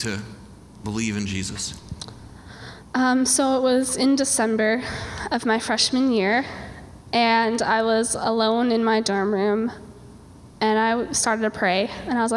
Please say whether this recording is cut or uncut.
uncut